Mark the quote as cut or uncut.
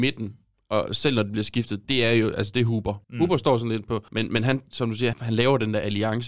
cut